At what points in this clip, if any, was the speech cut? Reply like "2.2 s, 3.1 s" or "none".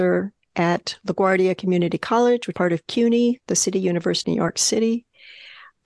2.5 s, 4.2 s

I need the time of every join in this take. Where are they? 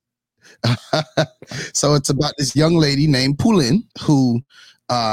3.9 s

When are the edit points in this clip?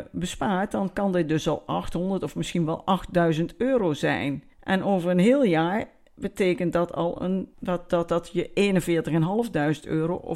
4.5 s, 7.5 s

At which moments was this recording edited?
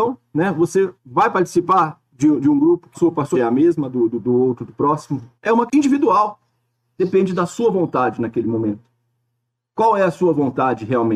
1.0 s, 2.9 s, 3.3 s, 3.9 s, 5.4 s, 5.7 s

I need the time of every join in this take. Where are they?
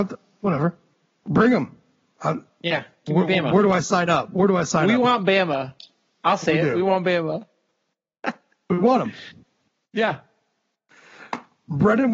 none

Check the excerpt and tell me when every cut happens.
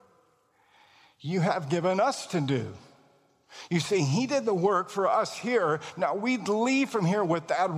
none

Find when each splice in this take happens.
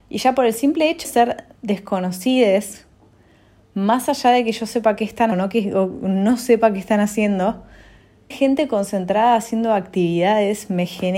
1.0 s, 5.3 s, 8.3 s

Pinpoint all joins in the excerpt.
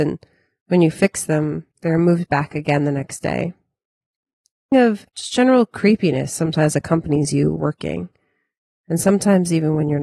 1.7 s, 4.7 s, 5.1 s, 7.6 s

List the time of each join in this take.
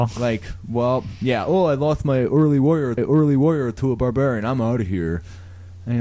3.0 s

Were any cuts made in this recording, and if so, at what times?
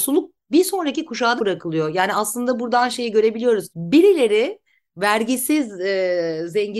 1.4 s, 3.7 s

